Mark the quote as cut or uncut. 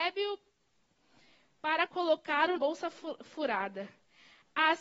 cut